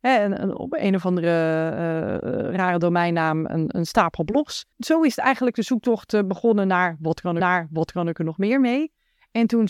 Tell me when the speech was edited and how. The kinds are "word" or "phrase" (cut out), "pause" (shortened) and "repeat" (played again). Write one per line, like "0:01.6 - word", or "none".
0:04.7 - pause
0:07.4 - repeat